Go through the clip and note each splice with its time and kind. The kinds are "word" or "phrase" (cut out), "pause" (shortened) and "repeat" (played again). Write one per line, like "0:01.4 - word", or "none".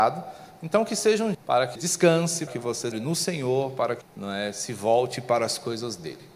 0:01.3 - word
0:01.8 - word
0:02.5 - word
0:02.9 - word
0:04.0 - word